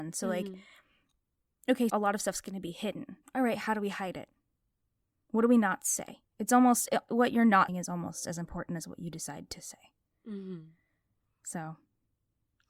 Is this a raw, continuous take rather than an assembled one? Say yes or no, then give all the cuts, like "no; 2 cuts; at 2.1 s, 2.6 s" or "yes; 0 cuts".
no; 4 cuts; at 1.9 s, 3.2 s, 7.1 s, 7.7 s